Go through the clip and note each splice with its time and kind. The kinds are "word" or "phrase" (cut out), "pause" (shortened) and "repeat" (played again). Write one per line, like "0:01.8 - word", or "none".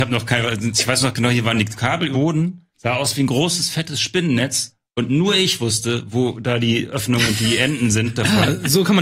0:02.1 - word
0:02.7 - pause